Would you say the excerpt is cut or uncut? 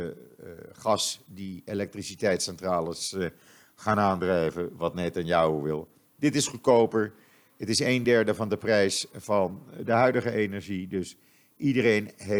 uncut